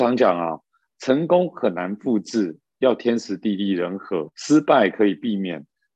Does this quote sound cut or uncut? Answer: cut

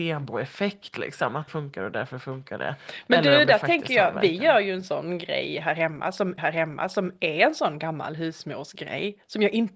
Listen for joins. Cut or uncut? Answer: cut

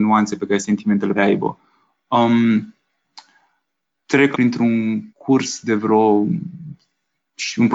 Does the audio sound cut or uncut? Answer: cut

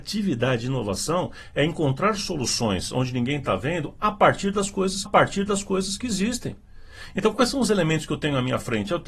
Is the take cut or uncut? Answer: cut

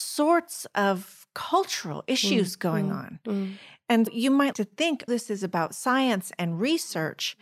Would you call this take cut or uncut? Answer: cut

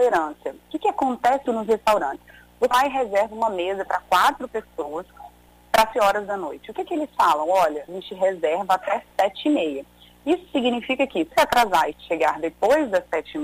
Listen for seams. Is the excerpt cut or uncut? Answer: cut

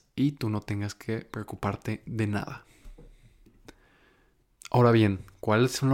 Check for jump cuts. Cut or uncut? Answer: uncut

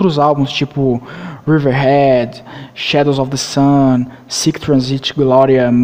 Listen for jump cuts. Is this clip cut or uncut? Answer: uncut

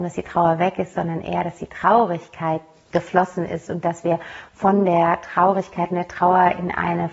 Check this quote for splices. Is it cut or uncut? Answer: uncut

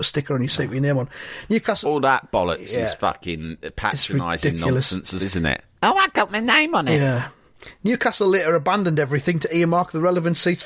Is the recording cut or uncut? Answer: cut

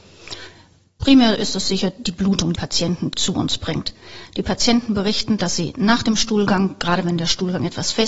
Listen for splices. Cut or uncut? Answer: cut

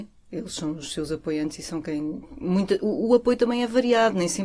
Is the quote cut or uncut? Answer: uncut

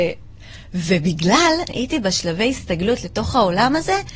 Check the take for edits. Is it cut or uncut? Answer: cut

